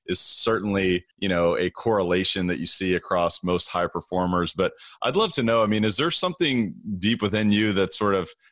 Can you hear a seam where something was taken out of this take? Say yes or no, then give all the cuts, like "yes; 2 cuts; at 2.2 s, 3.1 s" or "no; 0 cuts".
yes; 1 cut; at 1.1 s